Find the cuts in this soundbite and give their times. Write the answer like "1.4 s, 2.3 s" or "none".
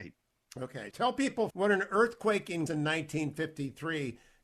0.9 s, 1.5 s, 2.7 s